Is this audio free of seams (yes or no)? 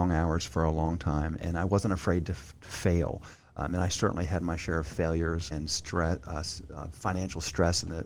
no